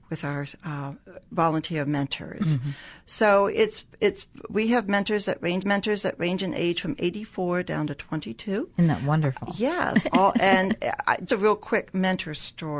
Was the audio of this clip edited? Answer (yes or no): yes